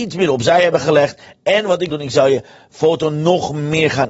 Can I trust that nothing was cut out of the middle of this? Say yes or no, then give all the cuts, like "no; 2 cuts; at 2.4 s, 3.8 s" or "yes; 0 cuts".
no; 1 cut; at 1.9 s